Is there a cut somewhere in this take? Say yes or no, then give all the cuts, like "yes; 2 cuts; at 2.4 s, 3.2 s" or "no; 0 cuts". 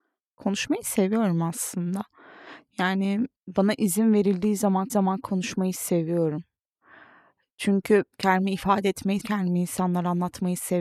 yes; 4 cuts; at 3.4 s, 4.9 s, 8.1 s, 9.2 s